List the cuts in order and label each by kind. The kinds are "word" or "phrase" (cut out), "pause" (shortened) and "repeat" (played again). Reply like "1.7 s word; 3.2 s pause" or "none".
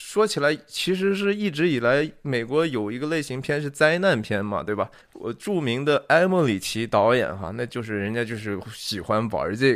5.0 s pause